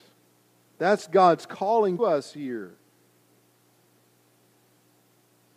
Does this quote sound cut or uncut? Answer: cut